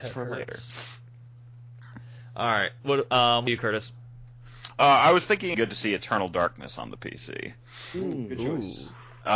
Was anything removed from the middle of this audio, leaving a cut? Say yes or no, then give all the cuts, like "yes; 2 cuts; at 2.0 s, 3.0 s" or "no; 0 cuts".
yes; 3 cuts; at 2.8 s, 3.5 s, 5.5 s